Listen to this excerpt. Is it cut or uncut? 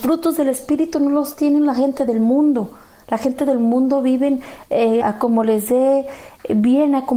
cut